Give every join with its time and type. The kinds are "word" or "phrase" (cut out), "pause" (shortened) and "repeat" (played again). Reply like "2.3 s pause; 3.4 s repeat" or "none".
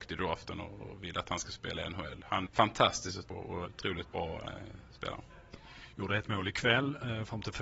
2.5 s word; 3.2 s word; 3.6 s word